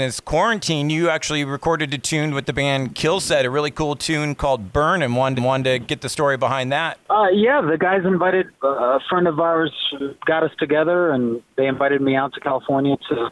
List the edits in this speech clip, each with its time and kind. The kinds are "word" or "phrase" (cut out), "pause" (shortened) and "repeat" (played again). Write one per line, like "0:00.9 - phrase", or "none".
0:05.4 - repeat